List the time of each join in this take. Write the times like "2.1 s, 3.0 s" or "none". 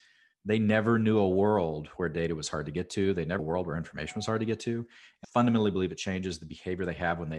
3.4 s, 5.2 s